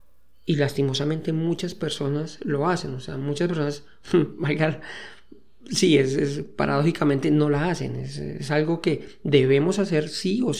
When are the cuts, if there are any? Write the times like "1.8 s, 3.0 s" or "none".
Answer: none